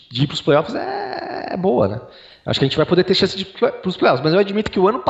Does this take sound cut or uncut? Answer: uncut